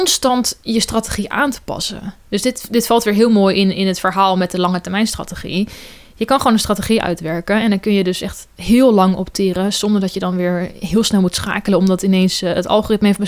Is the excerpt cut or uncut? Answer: uncut